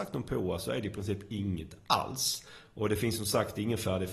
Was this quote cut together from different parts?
no; 0 cuts

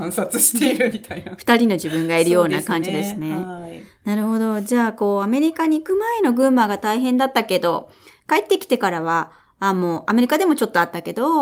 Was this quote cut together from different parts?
no; 0 cuts

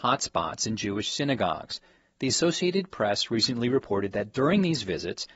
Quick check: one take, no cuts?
yes; 0 cuts

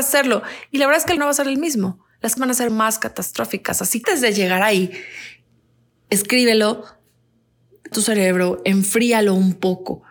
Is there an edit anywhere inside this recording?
yes; 5 cuts; at 1.2 s, 2.4 s, 2.7 s, 4.0 s, 7.9 s

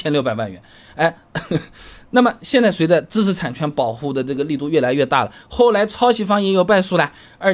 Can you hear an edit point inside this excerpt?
no; 0 cuts

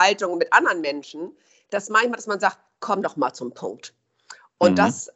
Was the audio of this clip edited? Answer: no; 0 cuts

